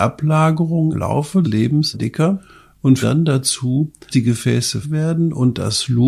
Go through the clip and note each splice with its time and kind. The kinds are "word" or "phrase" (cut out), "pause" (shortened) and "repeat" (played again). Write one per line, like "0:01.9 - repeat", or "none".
0:00.9 - word
0:01.4 - word
0:01.9 - word
0:03.0 - word
0:04.1 - word
0:04.8 - word